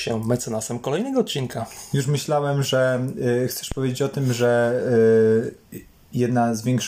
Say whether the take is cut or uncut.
uncut